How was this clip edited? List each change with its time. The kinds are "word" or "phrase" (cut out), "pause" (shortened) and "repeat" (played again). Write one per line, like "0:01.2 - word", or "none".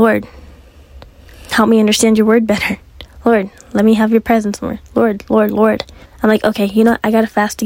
0:06.0 - pause